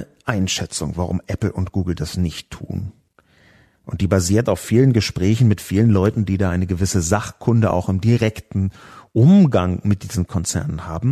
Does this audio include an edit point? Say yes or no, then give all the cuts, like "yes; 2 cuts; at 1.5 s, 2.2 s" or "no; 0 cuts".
no; 0 cuts